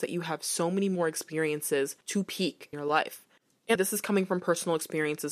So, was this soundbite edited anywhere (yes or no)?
yes